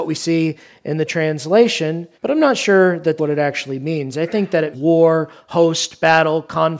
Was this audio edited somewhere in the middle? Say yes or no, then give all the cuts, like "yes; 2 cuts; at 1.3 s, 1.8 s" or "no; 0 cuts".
yes; 3 cuts; at 2.1 s, 3.2 s, 4.7 s